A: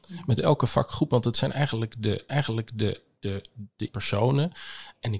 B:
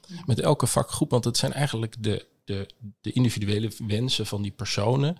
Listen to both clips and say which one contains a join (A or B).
A